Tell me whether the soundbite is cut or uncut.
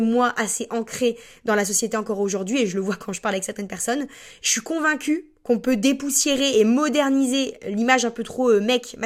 uncut